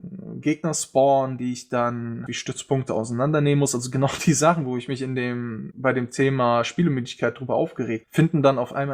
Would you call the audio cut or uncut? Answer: cut